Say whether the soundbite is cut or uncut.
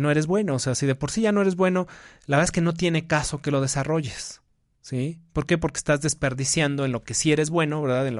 uncut